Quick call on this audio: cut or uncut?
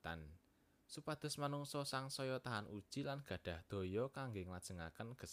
uncut